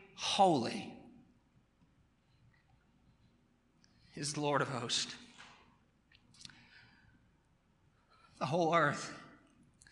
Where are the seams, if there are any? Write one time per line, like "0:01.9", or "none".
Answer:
none